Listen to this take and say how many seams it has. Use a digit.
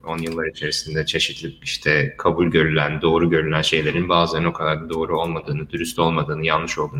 0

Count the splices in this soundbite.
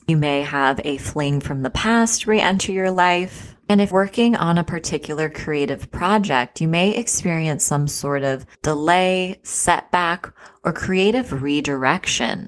2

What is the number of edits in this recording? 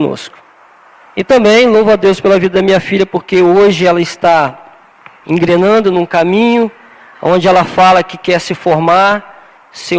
0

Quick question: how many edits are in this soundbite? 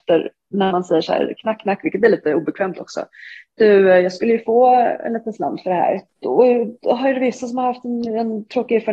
0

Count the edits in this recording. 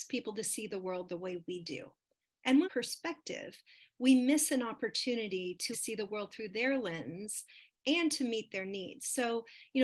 2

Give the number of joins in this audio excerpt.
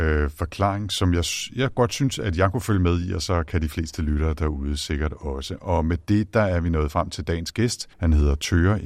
1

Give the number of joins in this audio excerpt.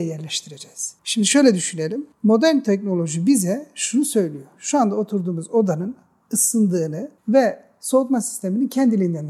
3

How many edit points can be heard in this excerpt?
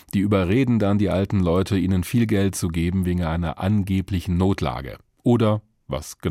0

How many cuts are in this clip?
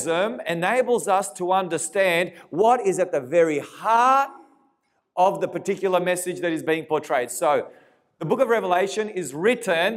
0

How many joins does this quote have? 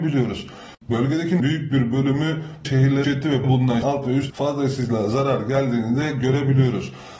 6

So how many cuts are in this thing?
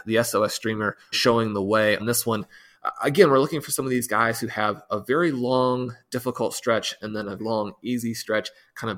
3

